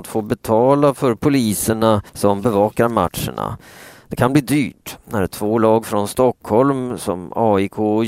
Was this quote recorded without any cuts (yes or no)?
no